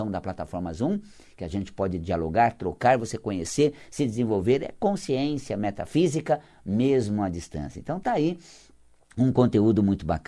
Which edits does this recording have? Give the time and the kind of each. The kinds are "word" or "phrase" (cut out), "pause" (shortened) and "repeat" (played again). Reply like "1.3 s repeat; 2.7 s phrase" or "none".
none